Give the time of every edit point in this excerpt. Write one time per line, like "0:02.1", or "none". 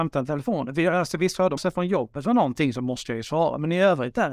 0:01.6